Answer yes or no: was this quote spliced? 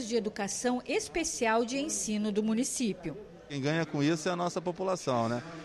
no